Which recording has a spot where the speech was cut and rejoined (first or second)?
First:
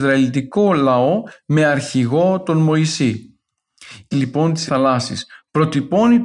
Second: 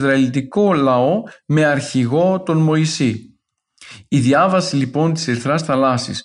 first